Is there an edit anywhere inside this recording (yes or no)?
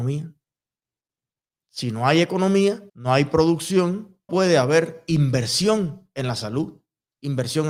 yes